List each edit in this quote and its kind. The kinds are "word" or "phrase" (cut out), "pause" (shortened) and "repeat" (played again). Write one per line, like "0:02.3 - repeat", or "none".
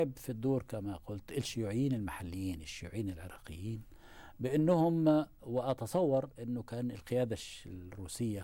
none

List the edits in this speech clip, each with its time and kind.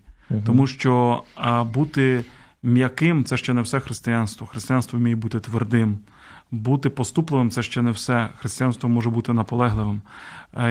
none

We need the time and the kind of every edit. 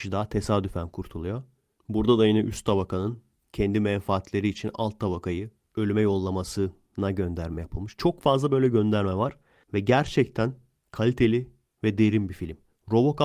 none

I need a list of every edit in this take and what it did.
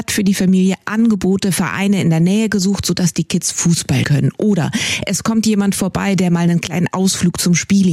0:04.0 - word

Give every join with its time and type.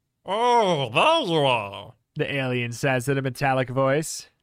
none

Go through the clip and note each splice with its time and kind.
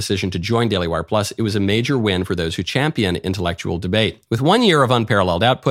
none

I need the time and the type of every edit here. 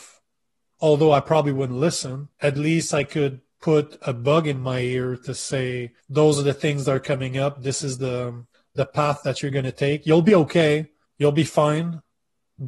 0:02.3 - pause
0:06.0 - pause
0:08.5 - pause
0:11.1 - pause

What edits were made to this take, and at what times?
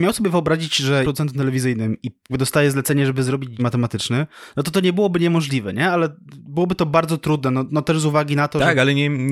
0:01.0 - word
0:02.3 - word
0:03.6 - phrase
0:07.7 - word

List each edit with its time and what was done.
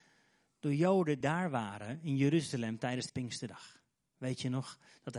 0:01.2 - word
0:03.1 - word

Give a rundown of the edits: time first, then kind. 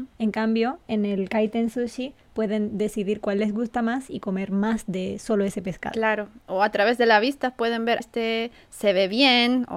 0:08.0 - word

